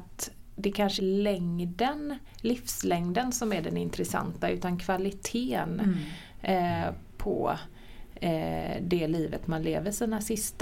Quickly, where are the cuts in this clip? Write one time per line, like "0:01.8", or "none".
0:01.0